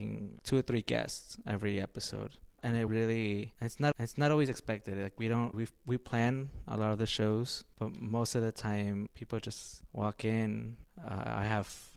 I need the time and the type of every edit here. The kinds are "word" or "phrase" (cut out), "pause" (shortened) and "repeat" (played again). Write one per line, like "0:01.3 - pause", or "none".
0:02.5 - pause
0:02.9 - word
0:03.9 - repeat
0:05.5 - word
0:09.1 - word